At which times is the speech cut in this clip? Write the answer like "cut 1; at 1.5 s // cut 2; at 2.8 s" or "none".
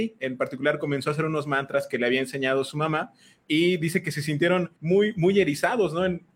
cut 1; at 4.8 s